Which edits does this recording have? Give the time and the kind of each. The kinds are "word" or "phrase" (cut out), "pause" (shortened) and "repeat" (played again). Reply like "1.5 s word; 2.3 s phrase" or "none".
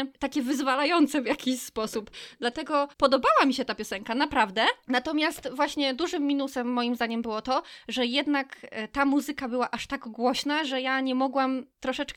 2.9 s pause